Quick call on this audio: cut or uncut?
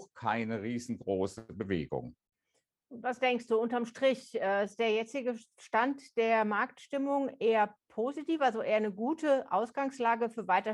uncut